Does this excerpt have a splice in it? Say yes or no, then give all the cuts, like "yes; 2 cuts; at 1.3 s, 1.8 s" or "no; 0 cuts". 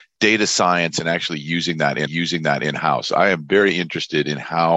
yes; 1 cut; at 2.1 s